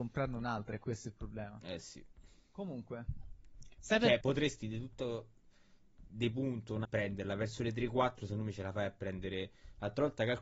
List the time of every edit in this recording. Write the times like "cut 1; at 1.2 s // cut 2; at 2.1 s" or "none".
cut 1; at 3.8 s // cut 2; at 4.2 s // cut 3; at 4.6 s // cut 4; at 6.8 s